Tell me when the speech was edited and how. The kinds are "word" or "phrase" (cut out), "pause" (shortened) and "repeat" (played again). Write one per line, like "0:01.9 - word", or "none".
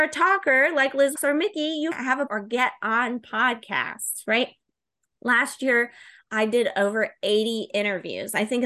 0:01.2 - word
0:01.9 - word
0:02.3 - word